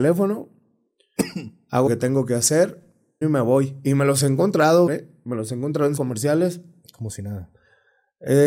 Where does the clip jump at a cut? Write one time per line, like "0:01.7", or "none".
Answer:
0:01.9
0:03.2
0:04.9
0:06.0